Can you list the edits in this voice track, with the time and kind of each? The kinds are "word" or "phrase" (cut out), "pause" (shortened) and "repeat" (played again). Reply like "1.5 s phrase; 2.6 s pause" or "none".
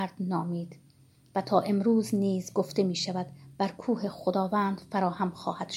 none